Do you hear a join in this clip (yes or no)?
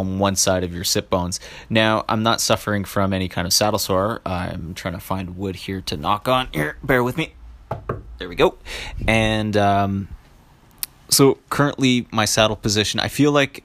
no